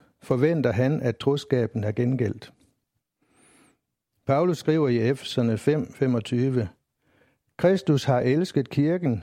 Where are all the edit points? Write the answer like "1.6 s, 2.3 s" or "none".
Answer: none